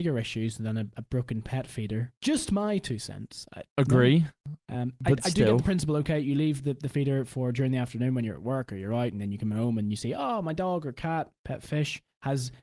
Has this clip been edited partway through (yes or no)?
no